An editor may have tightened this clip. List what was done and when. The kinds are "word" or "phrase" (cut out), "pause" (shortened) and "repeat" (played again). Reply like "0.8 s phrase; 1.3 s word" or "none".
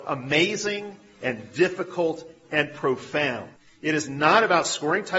3.6 s pause